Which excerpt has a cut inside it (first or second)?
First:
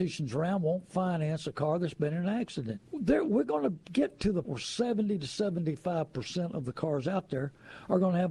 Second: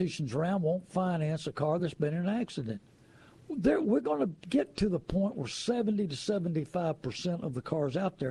first